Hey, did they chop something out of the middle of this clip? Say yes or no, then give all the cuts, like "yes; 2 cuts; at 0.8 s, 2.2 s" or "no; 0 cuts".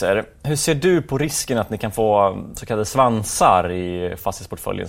no; 0 cuts